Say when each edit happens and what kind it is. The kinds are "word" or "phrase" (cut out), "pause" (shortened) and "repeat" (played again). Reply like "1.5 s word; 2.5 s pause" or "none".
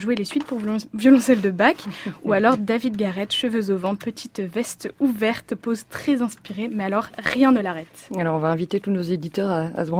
none